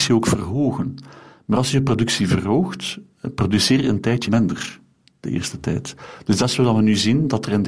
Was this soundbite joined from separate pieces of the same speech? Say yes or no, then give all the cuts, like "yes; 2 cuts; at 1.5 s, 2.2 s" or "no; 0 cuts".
yes; 1 cut; at 4.3 s